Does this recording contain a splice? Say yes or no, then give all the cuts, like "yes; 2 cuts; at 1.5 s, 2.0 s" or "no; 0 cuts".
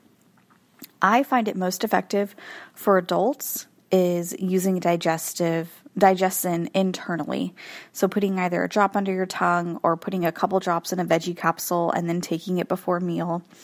no; 0 cuts